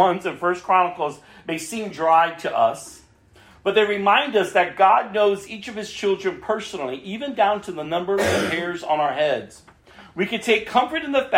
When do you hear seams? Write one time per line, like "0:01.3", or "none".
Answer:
none